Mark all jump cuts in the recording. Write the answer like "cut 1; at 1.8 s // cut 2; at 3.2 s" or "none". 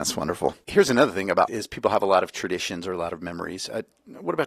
cut 1; at 1.5 s